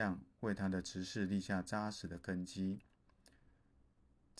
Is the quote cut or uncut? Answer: uncut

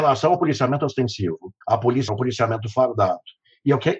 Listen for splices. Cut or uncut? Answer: cut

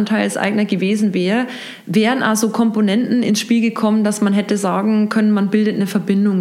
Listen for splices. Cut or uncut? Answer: uncut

